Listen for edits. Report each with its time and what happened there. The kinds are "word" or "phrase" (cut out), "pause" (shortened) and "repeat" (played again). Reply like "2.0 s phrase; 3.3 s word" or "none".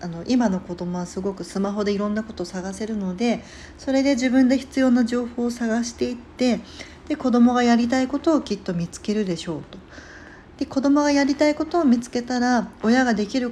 none